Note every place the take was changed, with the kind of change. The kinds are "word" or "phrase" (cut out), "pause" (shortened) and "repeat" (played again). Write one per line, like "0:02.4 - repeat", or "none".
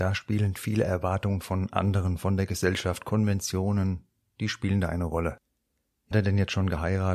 0:06.1 - word

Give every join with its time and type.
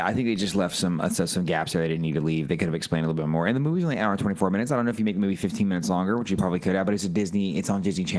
none

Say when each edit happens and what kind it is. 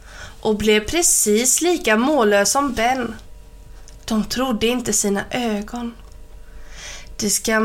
none

